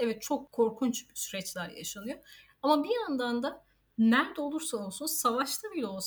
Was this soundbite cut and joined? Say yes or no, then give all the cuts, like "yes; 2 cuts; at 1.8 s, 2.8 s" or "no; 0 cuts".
no; 0 cuts